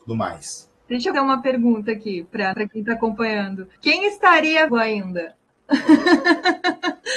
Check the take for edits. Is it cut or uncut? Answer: cut